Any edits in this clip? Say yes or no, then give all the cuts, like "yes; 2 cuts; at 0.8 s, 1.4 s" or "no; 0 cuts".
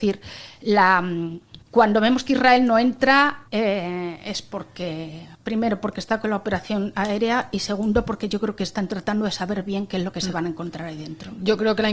yes; 3 cuts; at 1.6 s, 3.5 s, 5.3 s